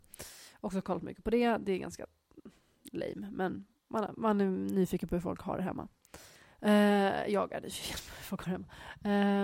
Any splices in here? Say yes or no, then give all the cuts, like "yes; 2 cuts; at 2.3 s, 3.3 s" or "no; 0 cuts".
yes; 2 cuts; at 3.8 s, 6.4 s